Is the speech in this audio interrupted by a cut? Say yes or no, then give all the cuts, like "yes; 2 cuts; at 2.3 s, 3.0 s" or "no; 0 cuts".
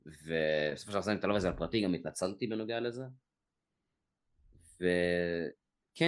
no; 0 cuts